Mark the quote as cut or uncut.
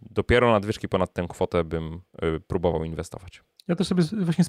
uncut